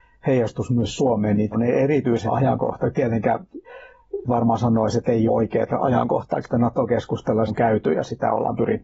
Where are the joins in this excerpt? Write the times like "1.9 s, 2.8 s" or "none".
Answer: 1.5 s, 2.3 s, 4.2 s, 5.3 s, 6.4 s, 7.5 s